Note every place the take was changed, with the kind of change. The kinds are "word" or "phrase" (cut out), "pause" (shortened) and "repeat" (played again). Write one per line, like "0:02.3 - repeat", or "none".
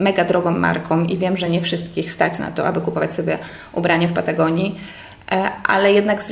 none